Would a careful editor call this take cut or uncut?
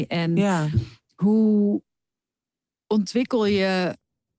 uncut